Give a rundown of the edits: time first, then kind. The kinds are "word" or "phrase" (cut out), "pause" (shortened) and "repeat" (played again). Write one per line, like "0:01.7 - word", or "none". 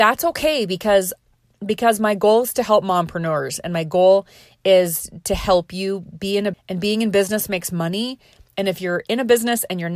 0:06.5 - word